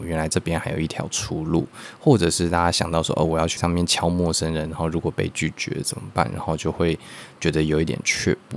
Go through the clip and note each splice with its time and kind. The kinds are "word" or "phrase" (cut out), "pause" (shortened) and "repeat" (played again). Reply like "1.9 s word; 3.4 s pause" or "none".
3.6 s word